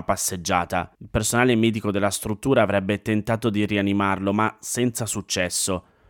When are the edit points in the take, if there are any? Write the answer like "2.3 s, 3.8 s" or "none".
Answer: 0.9 s